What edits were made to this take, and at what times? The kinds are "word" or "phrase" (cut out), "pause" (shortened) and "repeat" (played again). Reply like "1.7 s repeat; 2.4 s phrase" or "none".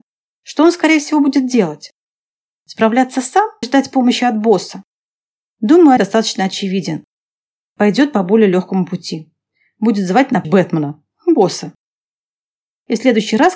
3.6 s word; 6.0 s word; 10.4 s word